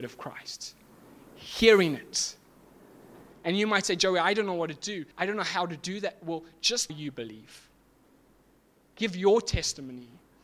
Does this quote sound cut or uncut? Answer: cut